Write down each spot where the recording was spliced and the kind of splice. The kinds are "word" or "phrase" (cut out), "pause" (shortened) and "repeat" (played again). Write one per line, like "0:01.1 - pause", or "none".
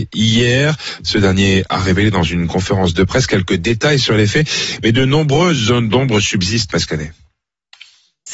0:06.7 - word